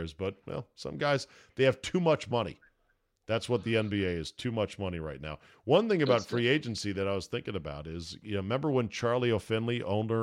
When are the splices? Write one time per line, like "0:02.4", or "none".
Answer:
none